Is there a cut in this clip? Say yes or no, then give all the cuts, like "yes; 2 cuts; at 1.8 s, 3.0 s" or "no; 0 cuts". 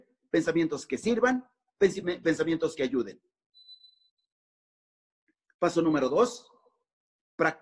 no; 0 cuts